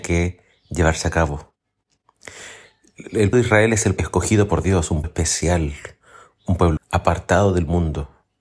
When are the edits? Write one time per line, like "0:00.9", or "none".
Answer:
0:03.3
0:04.0
0:05.0
0:06.8